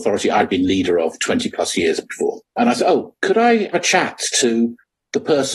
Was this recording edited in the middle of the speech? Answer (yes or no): yes